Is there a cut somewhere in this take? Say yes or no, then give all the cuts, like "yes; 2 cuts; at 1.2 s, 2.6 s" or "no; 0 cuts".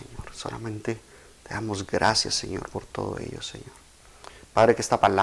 no; 0 cuts